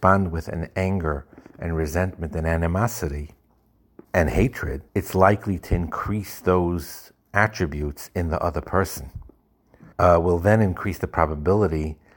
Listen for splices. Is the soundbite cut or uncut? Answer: cut